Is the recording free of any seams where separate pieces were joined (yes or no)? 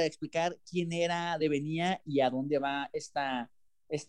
no